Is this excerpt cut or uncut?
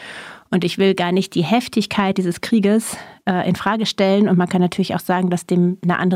uncut